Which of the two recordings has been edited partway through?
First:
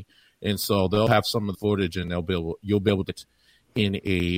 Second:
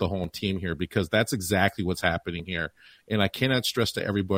first; 2 cuts; at 1.5 s, 3.1 s

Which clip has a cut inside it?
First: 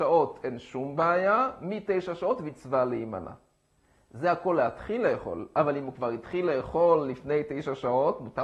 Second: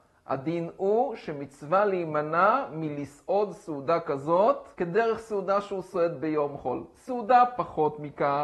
second; 1 cut; at 4.7 s

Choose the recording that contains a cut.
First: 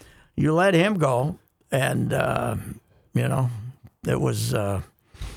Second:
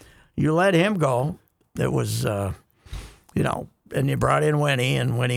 second; 1 cut; at 1.6 s

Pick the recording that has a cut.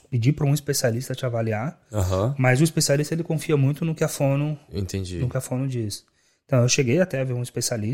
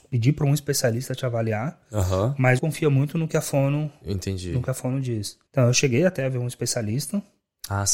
second; 2 cuts; at 2.6 s, 5.5 s

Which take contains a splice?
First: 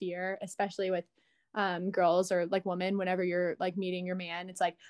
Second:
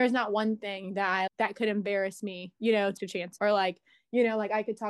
second; 3 cuts; at 1.3 s, 3.0 s, 3.4 s

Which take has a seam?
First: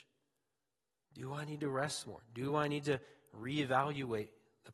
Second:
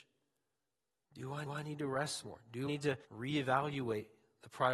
second; 3 cuts; at 1.5 s, 2.7 s, 3.0 s

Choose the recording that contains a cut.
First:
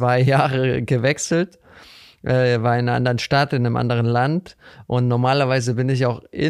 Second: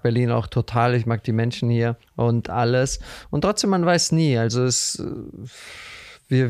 second; 1 cut; at 2.0 s

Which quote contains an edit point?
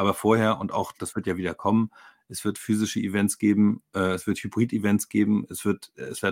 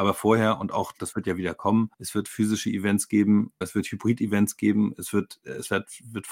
second; 2 cuts; at 1.9 s, 3.6 s

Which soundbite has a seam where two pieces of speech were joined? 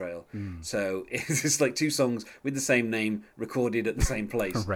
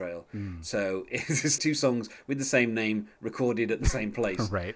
second; 1 cut; at 1.6 s

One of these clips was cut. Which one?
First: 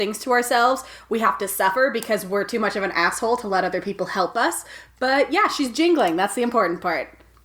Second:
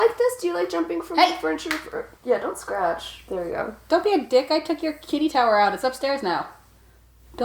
second; 1 cut; at 2.2 s

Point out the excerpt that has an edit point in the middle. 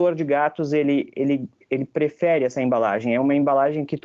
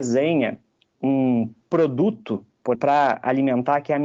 second; 1 cut; at 2.7 s

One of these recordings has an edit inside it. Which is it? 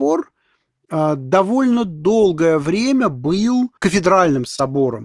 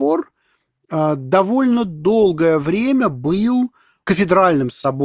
first; 1 cut; at 3.8 s

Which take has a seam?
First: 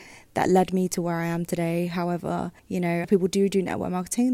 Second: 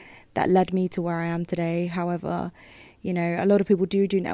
first; 2 cuts; at 2.6 s, 3.0 s

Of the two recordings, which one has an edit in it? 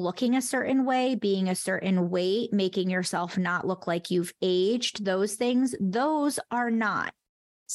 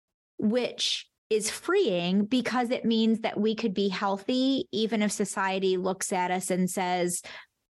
second; 1 cut; at 1.2 s

